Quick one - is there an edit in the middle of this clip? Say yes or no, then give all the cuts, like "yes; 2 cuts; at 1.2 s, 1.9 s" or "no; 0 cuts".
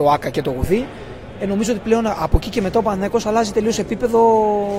no; 0 cuts